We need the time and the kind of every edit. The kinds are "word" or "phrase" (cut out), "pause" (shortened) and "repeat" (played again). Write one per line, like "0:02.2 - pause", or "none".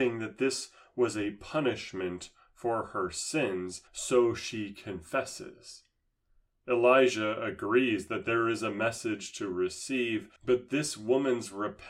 0:03.9 - pause
0:10.4 - pause

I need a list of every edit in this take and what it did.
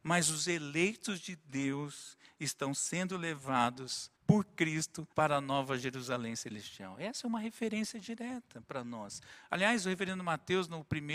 0:04.2 - pause
0:05.1 - pause

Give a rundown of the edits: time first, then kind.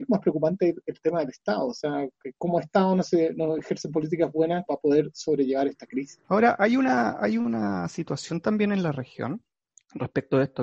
0:04.7 - word
0:06.2 - pause

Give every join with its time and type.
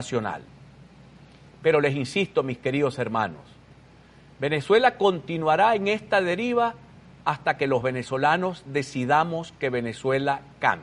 none

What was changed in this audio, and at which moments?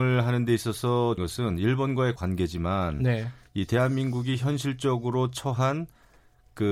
0:01.2 - word
0:02.2 - word

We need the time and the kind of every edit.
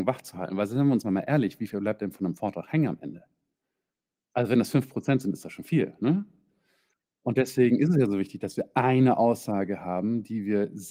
0:01.0 - word

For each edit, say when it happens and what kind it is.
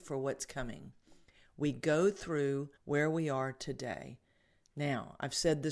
0:02.8 - pause

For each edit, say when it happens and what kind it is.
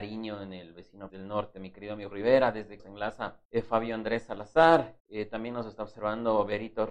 0:01.1 - word
0:02.1 - word
0:02.8 - word
0:03.4 - pause
0:05.0 - pause

